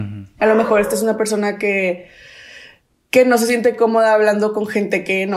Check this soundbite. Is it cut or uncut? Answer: uncut